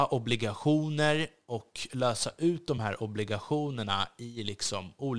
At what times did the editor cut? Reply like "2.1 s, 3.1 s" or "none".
none